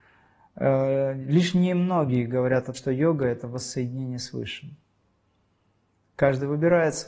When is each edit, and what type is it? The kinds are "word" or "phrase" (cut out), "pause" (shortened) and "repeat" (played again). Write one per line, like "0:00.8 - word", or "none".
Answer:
0:02.7 - word